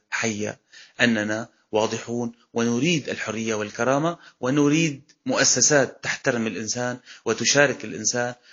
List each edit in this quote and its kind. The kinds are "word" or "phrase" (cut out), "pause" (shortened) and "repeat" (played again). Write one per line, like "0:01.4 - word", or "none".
none